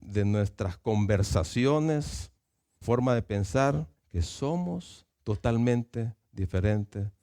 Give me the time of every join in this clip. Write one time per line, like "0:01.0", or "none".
0:02.8
0:04.0
0:05.1